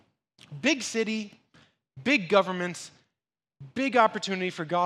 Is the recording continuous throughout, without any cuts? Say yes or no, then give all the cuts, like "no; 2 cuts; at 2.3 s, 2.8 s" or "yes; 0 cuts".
yes; 0 cuts